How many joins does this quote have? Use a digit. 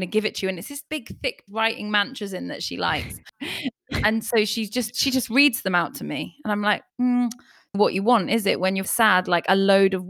3